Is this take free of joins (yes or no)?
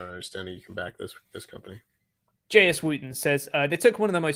yes